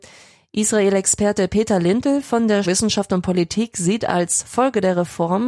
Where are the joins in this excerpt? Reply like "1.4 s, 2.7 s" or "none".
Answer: 2.6 s